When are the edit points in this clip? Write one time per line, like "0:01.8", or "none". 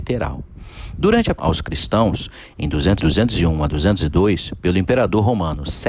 0:01.4
0:03.0

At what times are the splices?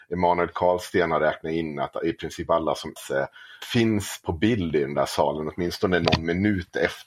0:03.0
0:03.6

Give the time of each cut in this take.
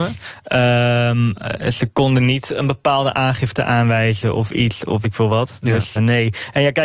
0:05.0
0:06.0

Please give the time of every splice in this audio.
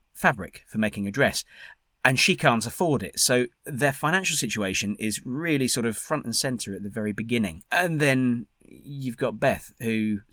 none

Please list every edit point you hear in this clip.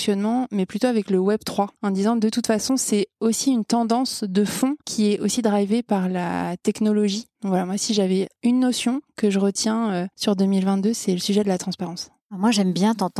0:01.8
0:04.8
0:08.4
0:10.1

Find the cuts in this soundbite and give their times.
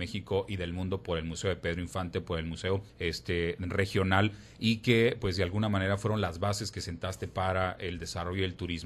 0:02.9

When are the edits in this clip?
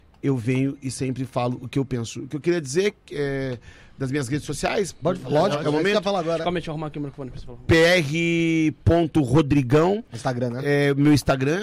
none

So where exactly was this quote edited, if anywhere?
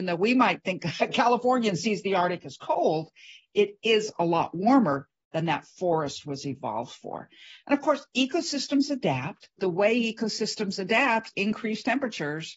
0:09.6
0:11.3

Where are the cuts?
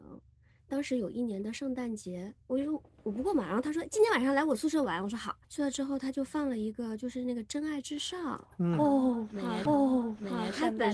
0:02.4
0:05.4
0:09.7

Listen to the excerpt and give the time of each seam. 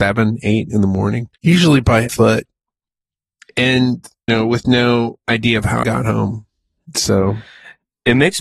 0:01.4
0:02.1
0:04.3
0:05.8

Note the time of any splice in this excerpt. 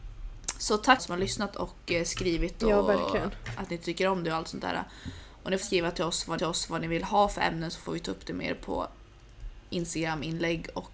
0:01.0
0:05.6
0:06.4

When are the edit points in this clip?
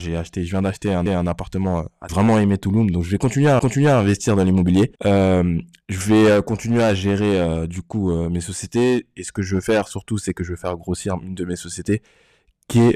0:01.1
0:02.1
0:03.6
0:05.0

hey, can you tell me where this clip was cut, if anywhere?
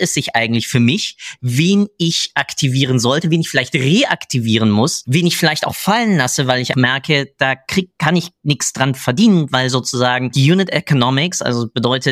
0:06.7

